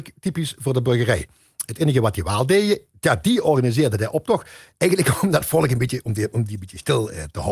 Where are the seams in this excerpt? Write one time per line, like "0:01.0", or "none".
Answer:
none